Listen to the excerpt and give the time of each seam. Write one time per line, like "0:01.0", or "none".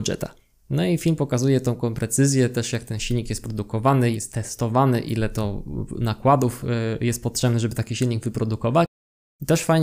0:04.1